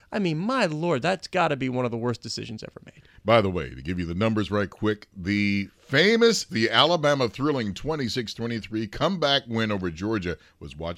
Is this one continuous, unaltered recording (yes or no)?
no